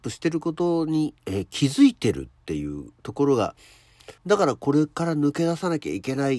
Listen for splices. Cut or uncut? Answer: cut